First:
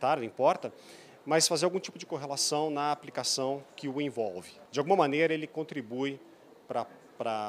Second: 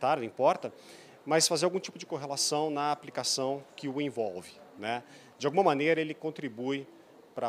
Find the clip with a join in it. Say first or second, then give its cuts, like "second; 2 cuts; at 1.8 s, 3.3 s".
first; 1 cut; at 4.6 s